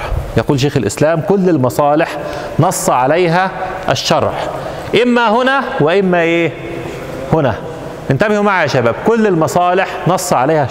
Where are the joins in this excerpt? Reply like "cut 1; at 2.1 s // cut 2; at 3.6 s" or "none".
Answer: none